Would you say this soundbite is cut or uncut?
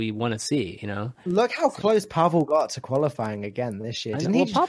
uncut